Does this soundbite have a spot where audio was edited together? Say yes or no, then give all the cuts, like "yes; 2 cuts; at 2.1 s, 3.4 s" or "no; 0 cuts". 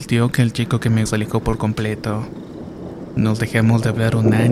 yes; 1 cut; at 1.1 s